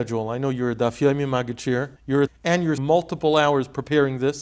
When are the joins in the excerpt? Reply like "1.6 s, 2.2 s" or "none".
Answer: 2.0 s, 2.3 s, 2.8 s